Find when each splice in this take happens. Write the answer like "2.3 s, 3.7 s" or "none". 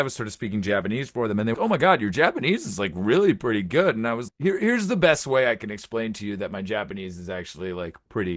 1.5 s, 4.3 s